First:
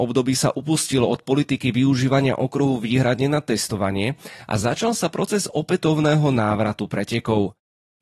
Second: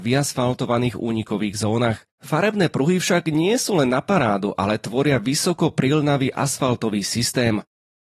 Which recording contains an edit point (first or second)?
second